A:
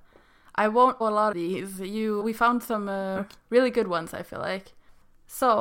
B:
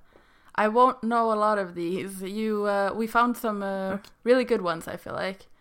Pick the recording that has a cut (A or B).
A